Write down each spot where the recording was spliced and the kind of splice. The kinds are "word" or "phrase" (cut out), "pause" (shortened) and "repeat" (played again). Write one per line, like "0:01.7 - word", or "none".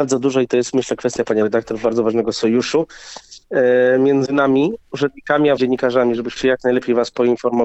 0:04.8 - pause
0:05.6 - word
0:06.4 - word